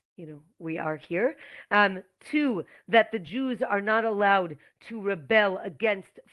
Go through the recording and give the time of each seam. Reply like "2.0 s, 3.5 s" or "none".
none